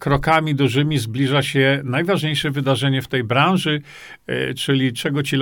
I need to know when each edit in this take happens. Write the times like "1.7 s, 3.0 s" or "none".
none

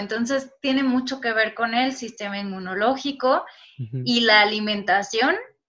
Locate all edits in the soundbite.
none

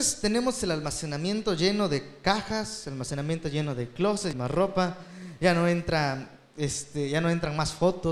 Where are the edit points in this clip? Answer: 4.3 s

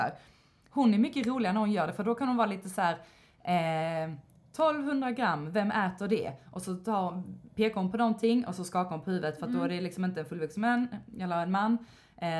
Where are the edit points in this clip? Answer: none

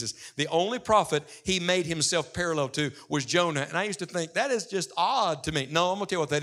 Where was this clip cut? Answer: none

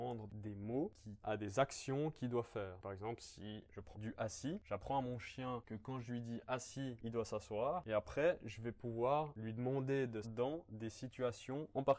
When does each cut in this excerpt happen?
1.2 s, 3.9 s, 10.2 s

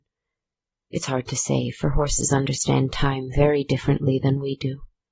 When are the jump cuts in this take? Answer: none

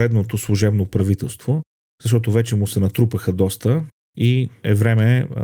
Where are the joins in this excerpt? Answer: none

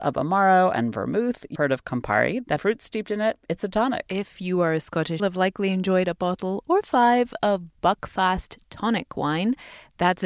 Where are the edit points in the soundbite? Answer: 1.6 s, 2.6 s, 5.2 s

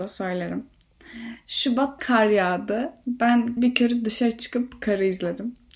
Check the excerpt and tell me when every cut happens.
2.0 s, 3.6 s

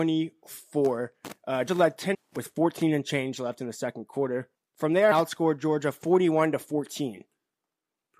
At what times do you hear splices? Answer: 1.7 s, 2.1 s, 4.5 s, 5.1 s

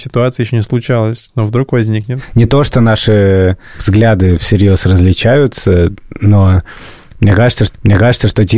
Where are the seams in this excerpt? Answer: 7.7 s

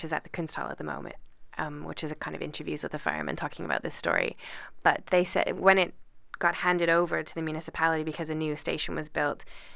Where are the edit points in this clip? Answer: 5.1 s, 5.6 s

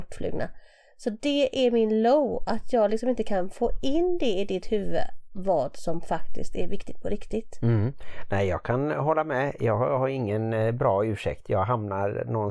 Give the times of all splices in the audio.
none

